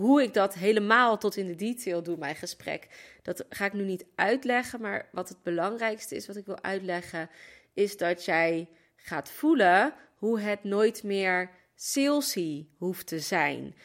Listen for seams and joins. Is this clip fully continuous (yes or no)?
yes